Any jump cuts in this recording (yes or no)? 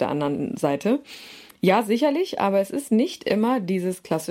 no